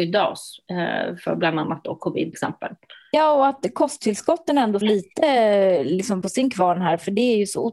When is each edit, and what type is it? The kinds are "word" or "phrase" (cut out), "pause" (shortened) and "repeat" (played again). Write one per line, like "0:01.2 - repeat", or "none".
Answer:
0:02.3 - word
0:04.8 - word
0:06.2 - word